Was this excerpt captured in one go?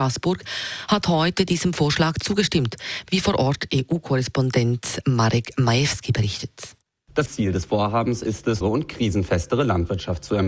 no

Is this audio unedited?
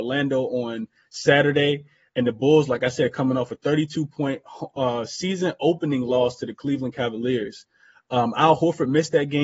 yes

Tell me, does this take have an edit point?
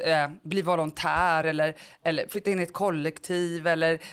no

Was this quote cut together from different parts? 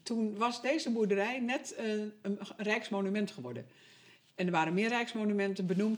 no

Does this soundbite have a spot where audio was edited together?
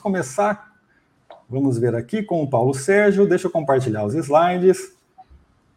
no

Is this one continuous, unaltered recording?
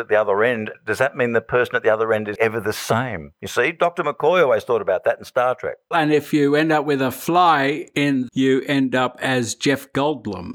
no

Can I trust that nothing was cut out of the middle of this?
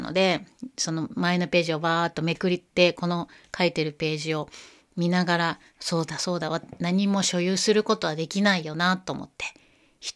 yes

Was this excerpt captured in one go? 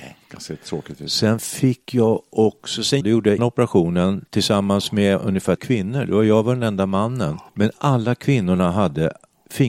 no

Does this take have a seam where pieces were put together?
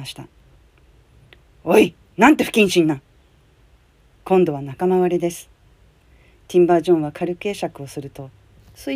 no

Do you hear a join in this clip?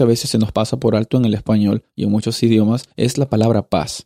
yes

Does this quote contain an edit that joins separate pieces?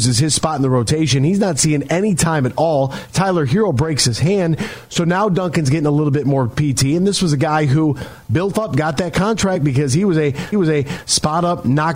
yes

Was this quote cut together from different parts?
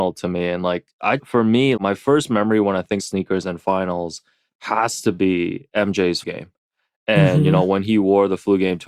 yes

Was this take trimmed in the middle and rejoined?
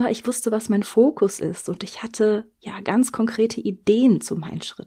no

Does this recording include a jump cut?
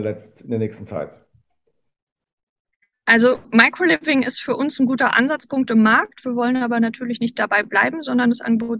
no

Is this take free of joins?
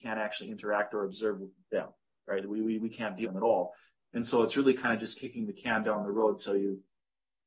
no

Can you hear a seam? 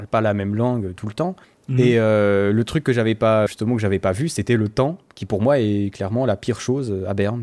yes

